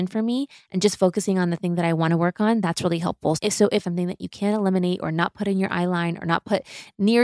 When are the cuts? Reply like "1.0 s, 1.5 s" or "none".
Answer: 3.8 s